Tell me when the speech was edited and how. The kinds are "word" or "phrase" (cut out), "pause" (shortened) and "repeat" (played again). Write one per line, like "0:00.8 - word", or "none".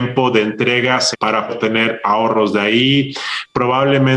0:01.1 - word
0:01.5 - word